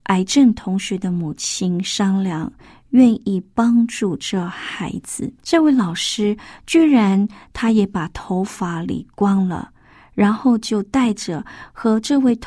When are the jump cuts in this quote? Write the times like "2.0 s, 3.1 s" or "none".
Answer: 5.4 s